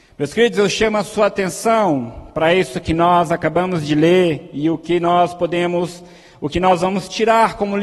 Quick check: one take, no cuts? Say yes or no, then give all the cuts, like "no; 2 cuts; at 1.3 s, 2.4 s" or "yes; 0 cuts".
yes; 0 cuts